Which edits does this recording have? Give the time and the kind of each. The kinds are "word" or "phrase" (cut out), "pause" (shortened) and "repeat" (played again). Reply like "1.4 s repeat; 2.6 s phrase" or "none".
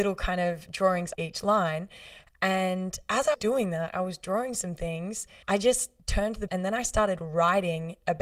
1.1 s word; 3.3 s word; 5.4 s pause; 6.0 s pause; 6.5 s word